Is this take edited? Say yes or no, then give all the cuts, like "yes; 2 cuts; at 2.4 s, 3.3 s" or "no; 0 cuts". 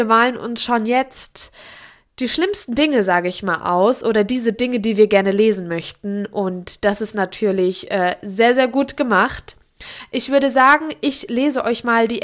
no; 0 cuts